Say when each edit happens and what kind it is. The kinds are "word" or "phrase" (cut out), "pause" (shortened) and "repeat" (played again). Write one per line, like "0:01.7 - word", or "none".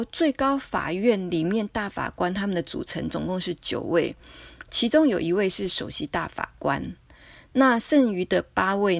none

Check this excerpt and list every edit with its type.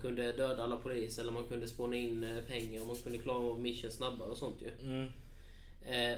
none

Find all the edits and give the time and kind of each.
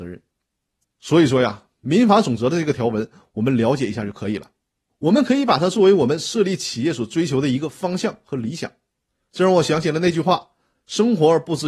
none

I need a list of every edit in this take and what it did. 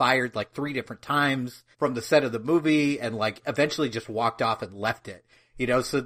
0:01.7 - pause

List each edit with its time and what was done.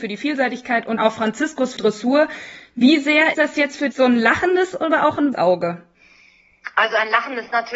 0:01.0 - word
0:01.8 - word
0:03.3 - word
0:03.9 - word
0:05.3 - word

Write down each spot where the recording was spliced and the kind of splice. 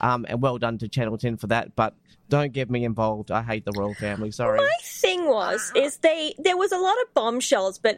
none

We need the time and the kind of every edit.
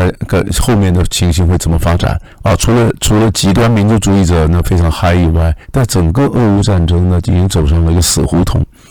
0:02.3 - pause
0:05.6 - pause

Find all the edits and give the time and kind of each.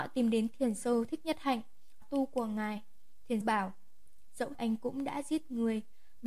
0:02.0 - phrase
0:03.4 - word
0:04.5 - word

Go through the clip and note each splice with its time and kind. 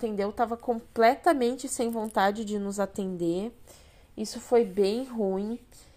none

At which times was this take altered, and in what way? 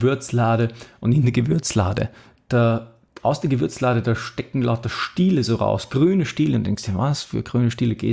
none

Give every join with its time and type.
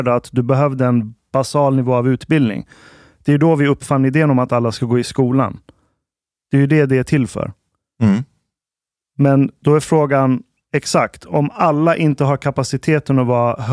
none

